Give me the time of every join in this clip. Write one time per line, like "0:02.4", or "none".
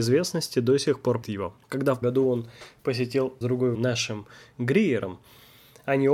0:01.2
0:01.6
0:02.0
0:03.4
0:03.7